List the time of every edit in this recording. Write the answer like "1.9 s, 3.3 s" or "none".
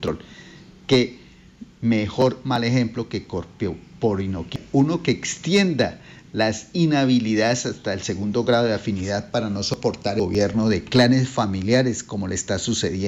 1.7 s